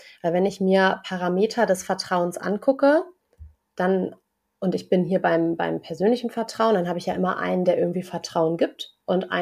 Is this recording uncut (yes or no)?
yes